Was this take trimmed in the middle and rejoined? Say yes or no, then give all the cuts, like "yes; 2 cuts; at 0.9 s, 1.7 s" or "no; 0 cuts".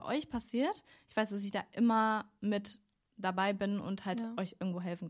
no; 0 cuts